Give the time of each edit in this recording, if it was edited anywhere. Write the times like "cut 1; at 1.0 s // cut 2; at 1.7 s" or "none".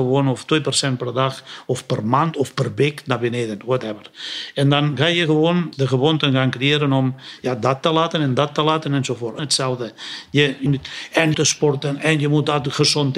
cut 1; at 9.4 s // cut 2; at 10.7 s // cut 3; at 11.3 s